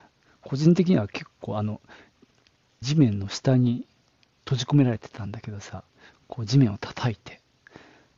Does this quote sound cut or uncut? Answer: cut